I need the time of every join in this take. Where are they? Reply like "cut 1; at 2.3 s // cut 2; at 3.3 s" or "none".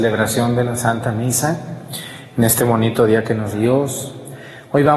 cut 1; at 3.5 s